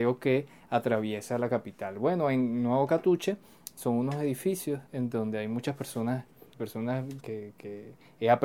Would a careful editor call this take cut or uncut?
cut